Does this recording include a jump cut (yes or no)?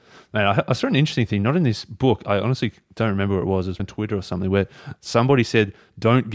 yes